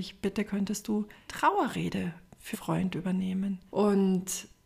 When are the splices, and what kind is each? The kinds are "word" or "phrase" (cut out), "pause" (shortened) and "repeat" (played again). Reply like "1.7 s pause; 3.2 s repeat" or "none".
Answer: 1.3 s word; 2.5 s word